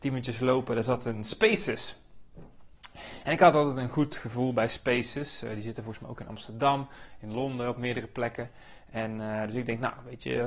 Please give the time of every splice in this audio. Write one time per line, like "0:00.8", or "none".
none